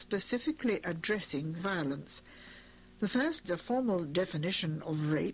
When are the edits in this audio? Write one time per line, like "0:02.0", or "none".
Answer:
0:01.6
0:03.4